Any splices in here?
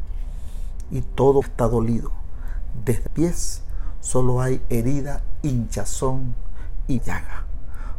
yes; 3 cuts; at 1.4 s, 3.1 s, 7.0 s

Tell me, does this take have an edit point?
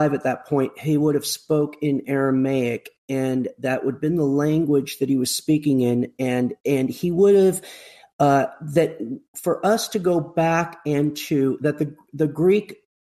yes; 1 cut; at 6.6 s

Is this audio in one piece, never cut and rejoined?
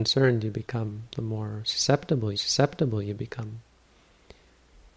no; 1 cut; at 2.3 s

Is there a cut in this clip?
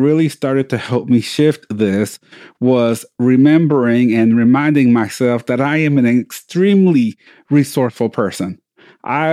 no; 0 cuts

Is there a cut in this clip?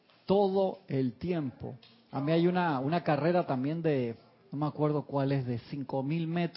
no; 0 cuts

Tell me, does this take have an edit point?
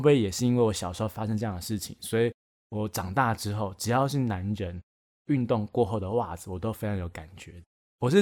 no; 0 cuts

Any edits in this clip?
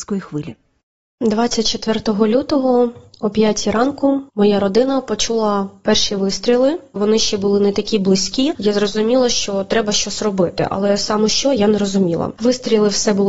yes; 1 cut; at 4.3 s

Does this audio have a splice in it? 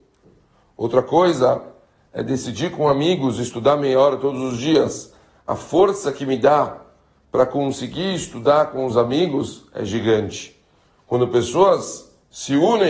no; 0 cuts

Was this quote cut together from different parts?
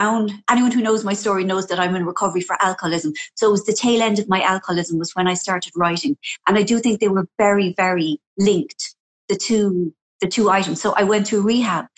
no; 0 cuts

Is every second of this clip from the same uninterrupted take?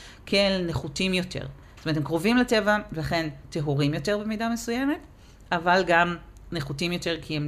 yes; 0 cuts

